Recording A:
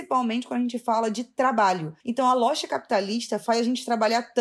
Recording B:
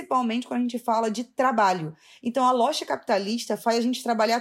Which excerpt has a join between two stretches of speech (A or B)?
A